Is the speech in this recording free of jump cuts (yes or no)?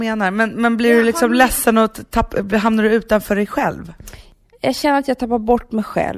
yes